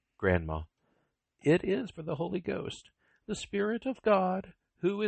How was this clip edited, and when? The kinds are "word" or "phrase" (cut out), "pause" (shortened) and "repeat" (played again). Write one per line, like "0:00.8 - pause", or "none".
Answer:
0:01.9 - word